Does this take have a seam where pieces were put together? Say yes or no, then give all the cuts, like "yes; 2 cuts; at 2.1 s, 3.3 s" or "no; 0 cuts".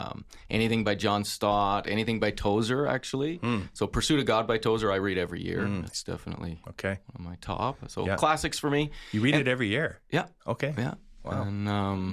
no; 0 cuts